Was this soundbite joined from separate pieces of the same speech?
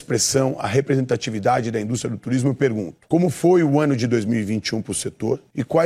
no; 0 cuts

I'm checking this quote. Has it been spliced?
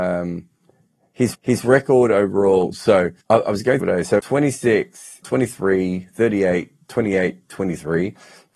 yes; 5 cuts; at 1.3 s, 3.2 s, 3.8 s, 4.2 s, 5.2 s

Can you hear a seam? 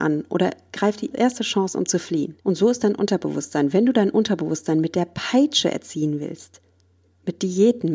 yes; 2 cuts; at 1.1 s, 2.4 s

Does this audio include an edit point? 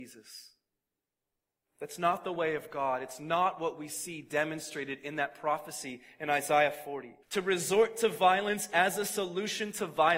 yes; 1 cut; at 7.2 s

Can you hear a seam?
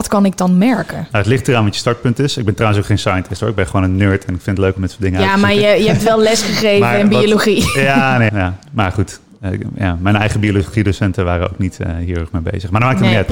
yes; 1 cut; at 8.3 s

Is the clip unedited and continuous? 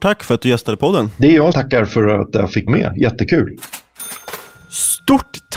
no; 2 cuts; at 1.5 s, 2.7 s

